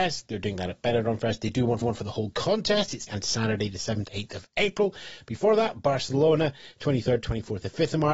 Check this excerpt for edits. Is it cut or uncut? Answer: cut